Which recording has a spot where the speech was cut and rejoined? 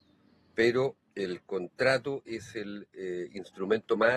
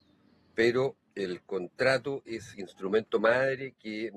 second; 1 cut; at 2.5 s

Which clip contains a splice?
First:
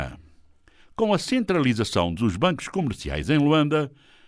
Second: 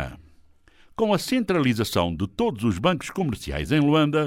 first; 1 cut; at 2.2 s

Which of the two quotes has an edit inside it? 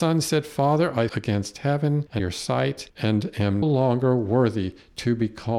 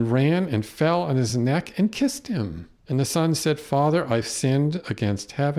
first; 3 cuts; at 1.1 s, 2.2 s, 3.6 s

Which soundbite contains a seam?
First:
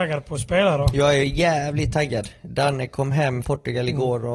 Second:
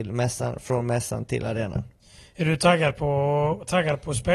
first; 1 cut; at 3.4 s

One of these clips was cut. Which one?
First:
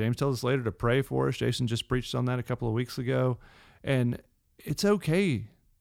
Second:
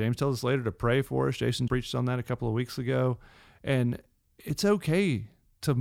second; 1 cut; at 1.7 s

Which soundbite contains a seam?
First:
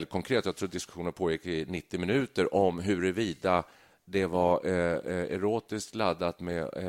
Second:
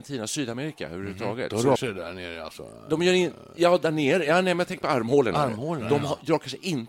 second; 1 cut; at 1.8 s

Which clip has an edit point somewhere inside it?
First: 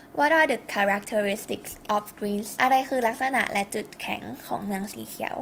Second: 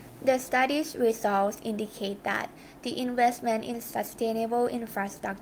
first; 2 cuts; at 1.9 s, 2.6 s

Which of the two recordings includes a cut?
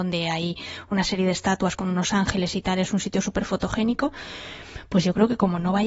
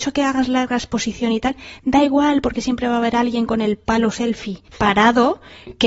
second; 1 cut; at 4.7 s

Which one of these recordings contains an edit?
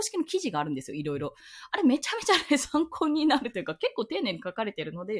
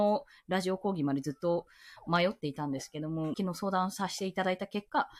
second; 1 cut; at 3.3 s

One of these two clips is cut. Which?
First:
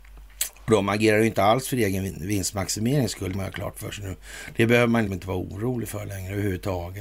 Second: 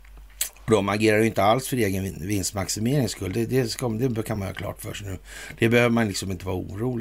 first; 2 cuts; at 3.3 s, 5.1 s

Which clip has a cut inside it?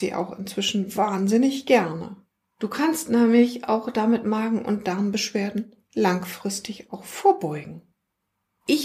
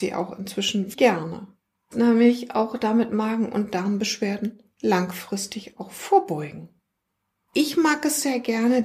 second; 2 cuts; at 0.9 s, 1.9 s

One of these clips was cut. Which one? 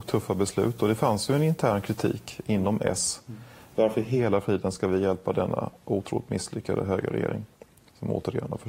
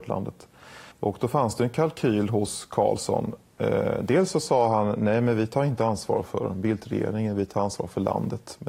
second; 1 cut; at 0.9 s

